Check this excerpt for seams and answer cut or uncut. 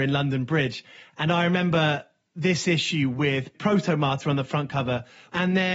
uncut